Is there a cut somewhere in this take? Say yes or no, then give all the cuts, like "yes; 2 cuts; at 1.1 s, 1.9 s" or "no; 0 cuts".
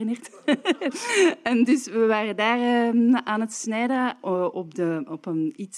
no; 0 cuts